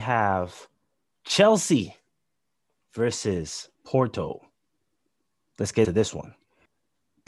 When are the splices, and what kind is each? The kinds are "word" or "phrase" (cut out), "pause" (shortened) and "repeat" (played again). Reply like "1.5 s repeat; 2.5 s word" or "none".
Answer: 3.7 s pause; 5.8 s word